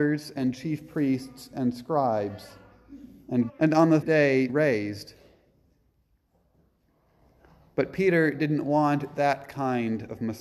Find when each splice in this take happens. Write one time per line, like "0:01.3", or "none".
0:03.5
0:04.0
0:04.5